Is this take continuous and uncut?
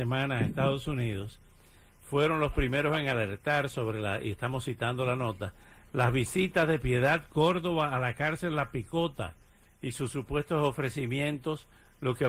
yes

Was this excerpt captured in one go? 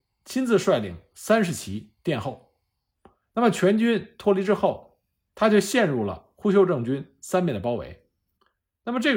yes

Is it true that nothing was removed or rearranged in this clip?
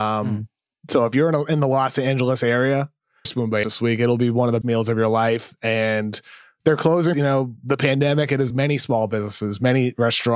no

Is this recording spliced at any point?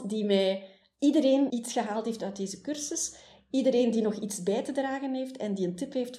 yes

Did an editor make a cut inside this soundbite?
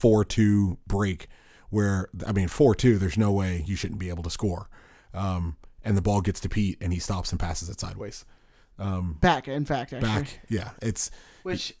no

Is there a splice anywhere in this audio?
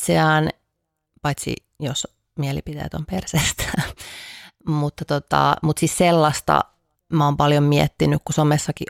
no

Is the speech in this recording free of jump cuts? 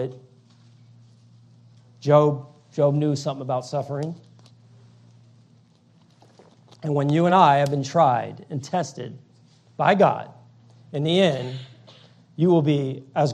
yes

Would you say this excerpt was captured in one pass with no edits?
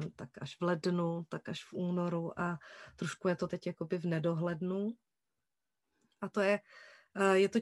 yes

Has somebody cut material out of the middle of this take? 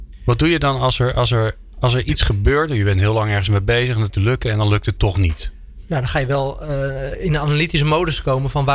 yes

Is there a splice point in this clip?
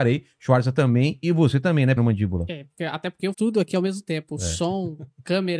yes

